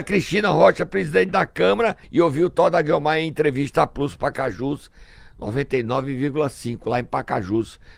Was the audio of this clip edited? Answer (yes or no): yes